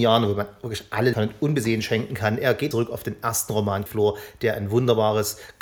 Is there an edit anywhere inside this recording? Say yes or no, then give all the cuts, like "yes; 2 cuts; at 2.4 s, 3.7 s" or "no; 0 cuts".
yes; 3 cuts; at 1.1 s, 2.7 s, 3.9 s